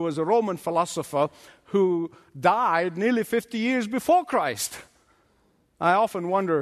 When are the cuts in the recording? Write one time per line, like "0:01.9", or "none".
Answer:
none